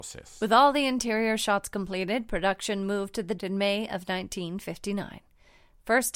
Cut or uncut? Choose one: cut